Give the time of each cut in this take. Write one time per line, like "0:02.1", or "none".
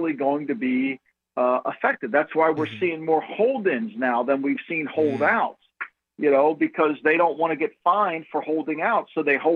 none